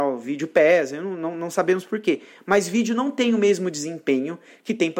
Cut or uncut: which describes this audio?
uncut